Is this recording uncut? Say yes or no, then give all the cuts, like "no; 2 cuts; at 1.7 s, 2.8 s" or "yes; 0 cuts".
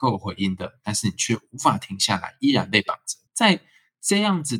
no; 1 cut; at 3.3 s